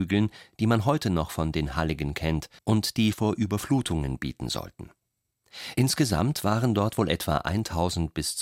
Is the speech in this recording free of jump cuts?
no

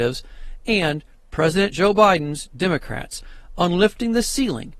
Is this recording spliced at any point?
no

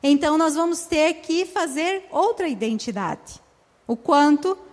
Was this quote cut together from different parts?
no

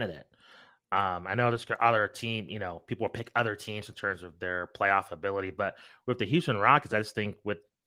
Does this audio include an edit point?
no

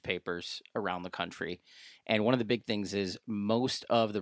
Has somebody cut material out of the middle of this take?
no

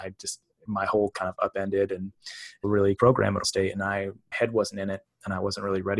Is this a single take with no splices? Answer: no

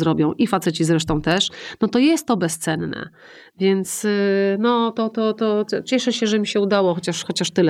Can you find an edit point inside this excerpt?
no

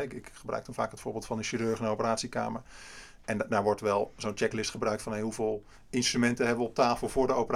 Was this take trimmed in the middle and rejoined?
no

